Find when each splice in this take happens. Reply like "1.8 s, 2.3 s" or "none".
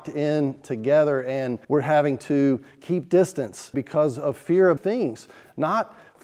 1.6 s, 3.7 s, 4.8 s